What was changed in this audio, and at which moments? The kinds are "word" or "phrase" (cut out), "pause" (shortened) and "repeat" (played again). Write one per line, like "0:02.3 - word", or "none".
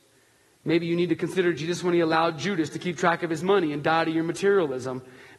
none